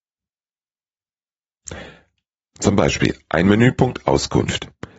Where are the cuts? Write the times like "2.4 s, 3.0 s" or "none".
none